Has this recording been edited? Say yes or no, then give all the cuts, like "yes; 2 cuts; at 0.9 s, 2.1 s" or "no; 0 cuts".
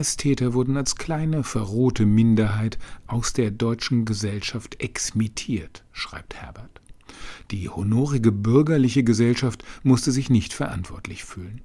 no; 0 cuts